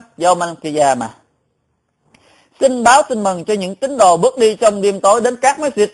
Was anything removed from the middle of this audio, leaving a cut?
no; 0 cuts

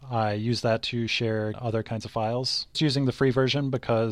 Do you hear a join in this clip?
yes; 2 cuts; at 1.5 s, 2.7 s

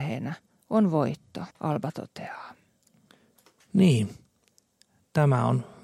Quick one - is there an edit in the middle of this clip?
yes; 2 cuts; at 1.5 s, 3.1 s

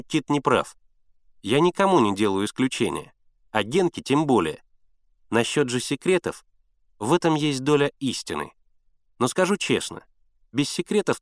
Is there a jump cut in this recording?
no; 0 cuts

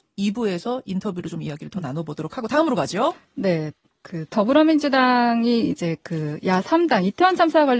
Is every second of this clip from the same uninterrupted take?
no; 1 cut; at 3.9 s

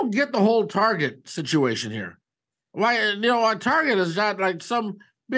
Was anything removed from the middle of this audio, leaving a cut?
no; 0 cuts

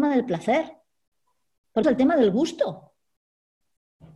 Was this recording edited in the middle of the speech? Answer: yes; 1 cut; at 1.8 s

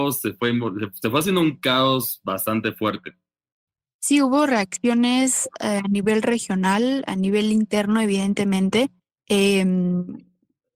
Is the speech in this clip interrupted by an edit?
yes; 2 cuts; at 3.7 s, 9.0 s

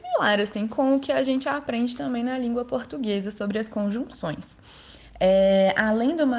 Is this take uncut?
yes; 0 cuts

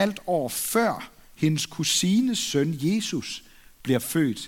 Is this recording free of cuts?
yes; 0 cuts

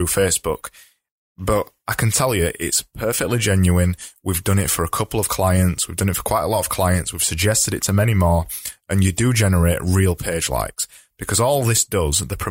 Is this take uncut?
yes; 0 cuts

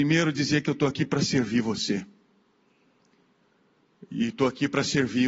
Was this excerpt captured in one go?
yes; 0 cuts

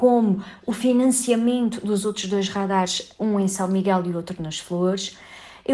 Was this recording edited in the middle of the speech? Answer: no; 0 cuts

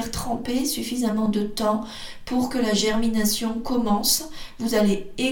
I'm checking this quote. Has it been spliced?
no; 0 cuts

